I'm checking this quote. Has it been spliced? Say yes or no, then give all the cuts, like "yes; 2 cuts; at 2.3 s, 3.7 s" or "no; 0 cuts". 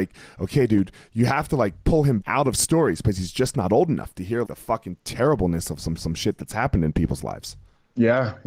yes; 3 cuts; at 2.2 s, 4.4 s, 6.0 s